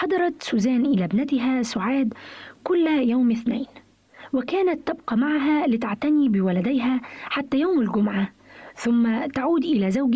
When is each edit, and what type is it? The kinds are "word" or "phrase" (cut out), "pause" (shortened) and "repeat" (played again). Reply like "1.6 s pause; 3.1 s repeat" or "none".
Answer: none